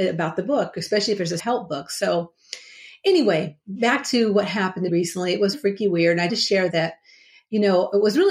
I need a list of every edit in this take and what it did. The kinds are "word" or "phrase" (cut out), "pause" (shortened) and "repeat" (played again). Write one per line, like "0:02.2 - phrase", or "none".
0:01.4 - word
0:04.9 - word
0:05.5 - word
0:06.3 - phrase
0:06.7 - word